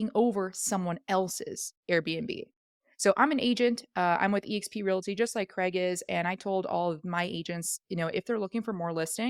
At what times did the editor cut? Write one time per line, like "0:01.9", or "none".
none